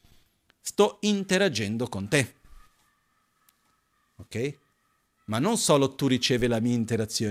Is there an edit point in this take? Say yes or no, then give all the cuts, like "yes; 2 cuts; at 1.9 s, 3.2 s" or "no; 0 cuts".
no; 0 cuts